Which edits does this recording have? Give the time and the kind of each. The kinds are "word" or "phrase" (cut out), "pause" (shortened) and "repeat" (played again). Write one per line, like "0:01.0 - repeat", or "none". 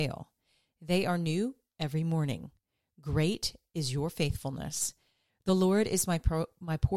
none